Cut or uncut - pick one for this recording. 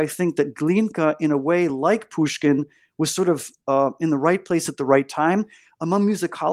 uncut